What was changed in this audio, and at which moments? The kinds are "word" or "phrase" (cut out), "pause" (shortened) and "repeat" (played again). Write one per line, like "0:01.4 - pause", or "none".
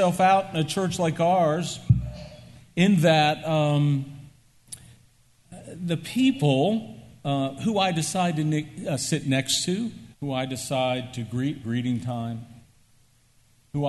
0:10.1 - pause
0:11.6 - word